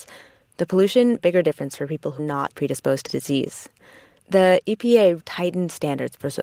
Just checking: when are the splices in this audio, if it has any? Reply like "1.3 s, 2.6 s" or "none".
1.2 s, 2.2 s, 2.5 s, 3.1 s, 5.2 s